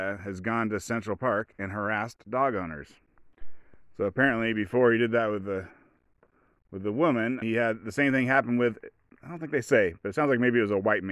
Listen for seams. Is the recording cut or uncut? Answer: cut